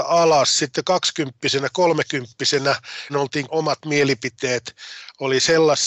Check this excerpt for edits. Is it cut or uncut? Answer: cut